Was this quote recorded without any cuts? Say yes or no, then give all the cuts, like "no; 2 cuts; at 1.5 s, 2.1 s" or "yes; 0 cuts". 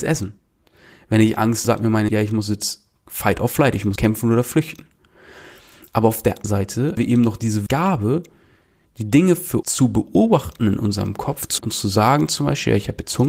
no; 8 cuts; at 1.6 s, 2.1 s, 4.0 s, 6.4 s, 7.0 s, 7.7 s, 9.6 s, 11.6 s